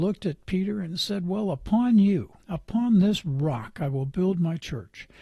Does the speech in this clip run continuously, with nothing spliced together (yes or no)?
no